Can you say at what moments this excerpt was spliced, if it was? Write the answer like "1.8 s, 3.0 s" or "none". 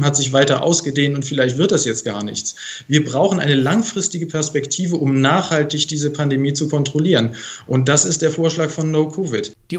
none